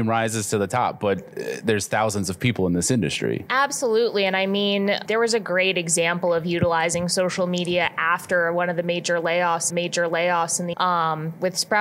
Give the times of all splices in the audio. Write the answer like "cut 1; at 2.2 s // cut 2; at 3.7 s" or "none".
cut 1; at 5.1 s // cut 2; at 9.7 s // cut 3; at 10.7 s